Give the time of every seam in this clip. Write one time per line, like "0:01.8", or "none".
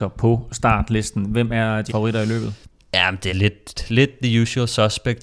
0:01.9
0:03.3